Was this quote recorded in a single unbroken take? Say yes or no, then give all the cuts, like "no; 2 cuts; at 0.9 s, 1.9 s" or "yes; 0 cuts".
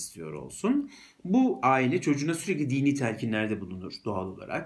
yes; 0 cuts